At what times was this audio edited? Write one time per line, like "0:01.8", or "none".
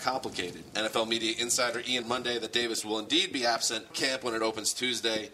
0:02.0
0:03.9